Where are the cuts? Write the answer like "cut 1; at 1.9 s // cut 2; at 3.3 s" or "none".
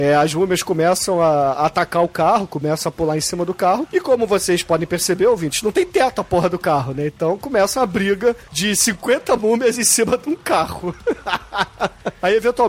none